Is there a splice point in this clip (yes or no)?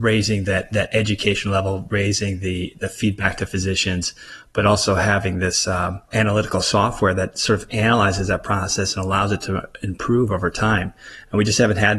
yes